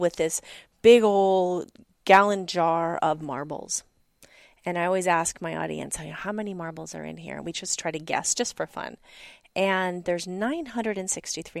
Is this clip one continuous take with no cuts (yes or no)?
yes